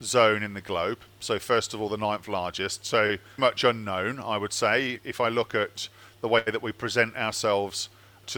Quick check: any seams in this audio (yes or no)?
yes